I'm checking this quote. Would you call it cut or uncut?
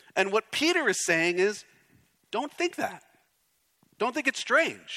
uncut